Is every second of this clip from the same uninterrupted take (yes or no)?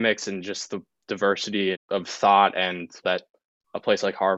no